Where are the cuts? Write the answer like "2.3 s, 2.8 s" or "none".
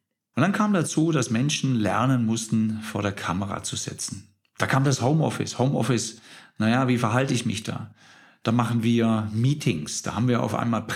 none